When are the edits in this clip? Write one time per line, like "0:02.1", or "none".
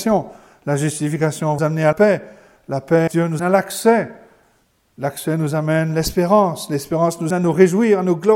0:01.6
0:01.9
0:03.1
0:03.4
0:07.3